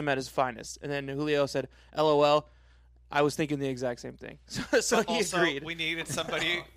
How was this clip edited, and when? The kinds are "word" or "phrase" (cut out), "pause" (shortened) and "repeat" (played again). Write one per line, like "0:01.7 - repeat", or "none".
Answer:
none